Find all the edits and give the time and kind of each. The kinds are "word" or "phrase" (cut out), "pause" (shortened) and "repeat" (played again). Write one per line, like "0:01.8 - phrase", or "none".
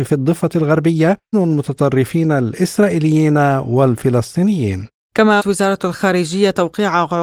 0:01.3 - word
0:05.4 - word